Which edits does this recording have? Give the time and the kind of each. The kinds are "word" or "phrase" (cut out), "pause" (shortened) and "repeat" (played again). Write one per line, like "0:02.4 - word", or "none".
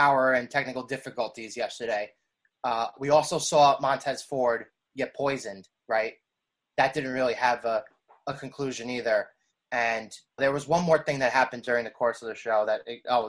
0:10.4 - word